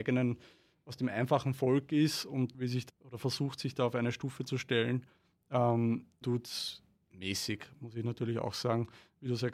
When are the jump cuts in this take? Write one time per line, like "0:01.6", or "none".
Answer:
0:02.5
0:02.9
0:06.2

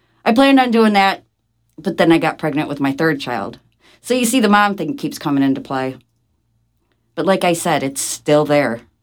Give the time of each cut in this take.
none

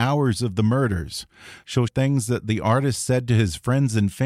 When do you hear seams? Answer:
0:01.9

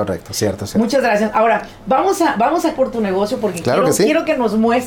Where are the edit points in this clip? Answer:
0:02.8

